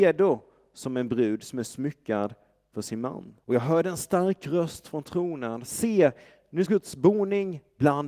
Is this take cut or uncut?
cut